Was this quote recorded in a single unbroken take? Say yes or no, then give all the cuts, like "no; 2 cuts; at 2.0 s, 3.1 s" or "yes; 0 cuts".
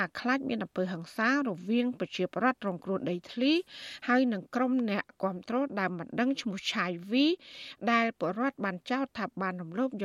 yes; 0 cuts